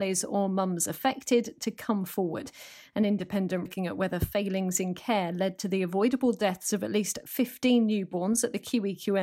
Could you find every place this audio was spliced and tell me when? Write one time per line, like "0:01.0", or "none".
0:03.7